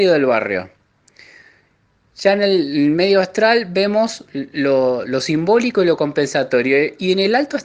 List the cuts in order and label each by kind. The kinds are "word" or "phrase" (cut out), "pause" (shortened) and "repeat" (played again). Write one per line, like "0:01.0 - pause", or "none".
none